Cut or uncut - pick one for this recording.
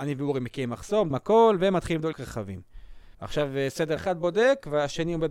cut